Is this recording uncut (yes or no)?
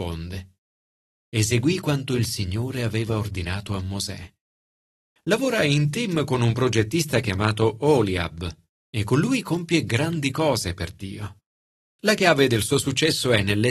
yes